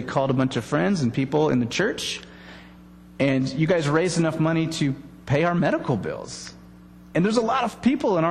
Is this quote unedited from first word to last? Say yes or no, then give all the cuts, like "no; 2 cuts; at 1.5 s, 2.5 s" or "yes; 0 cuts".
yes; 0 cuts